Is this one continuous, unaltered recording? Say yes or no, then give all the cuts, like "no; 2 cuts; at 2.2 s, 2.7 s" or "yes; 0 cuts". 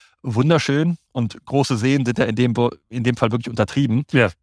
yes; 0 cuts